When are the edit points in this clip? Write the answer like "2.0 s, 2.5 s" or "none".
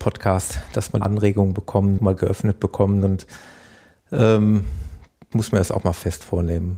1.0 s, 2.0 s, 5.3 s